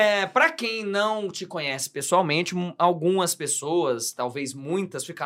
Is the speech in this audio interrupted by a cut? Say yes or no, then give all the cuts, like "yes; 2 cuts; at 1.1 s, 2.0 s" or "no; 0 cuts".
no; 0 cuts